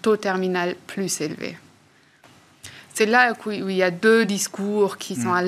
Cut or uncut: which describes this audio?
uncut